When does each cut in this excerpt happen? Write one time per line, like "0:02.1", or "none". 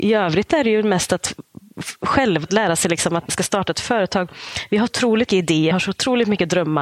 0:02.4
0:03.3
0:04.9
0:05.3
0:05.7